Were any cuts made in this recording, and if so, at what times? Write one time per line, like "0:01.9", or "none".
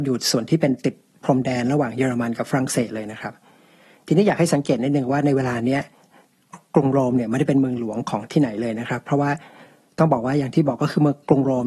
none